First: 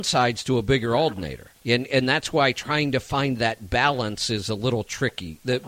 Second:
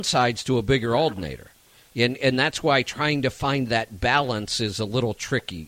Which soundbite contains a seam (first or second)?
first